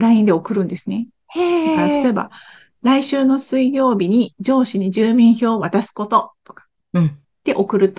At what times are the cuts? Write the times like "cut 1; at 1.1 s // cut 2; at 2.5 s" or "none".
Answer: none

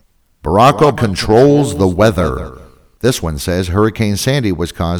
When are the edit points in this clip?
cut 1; at 0.9 s

